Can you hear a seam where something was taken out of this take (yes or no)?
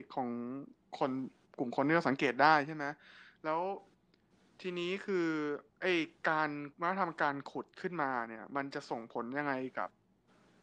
yes